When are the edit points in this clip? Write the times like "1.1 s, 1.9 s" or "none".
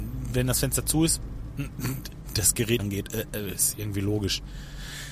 2.8 s